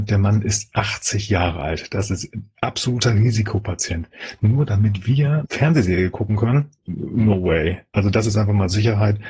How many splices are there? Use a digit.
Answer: 2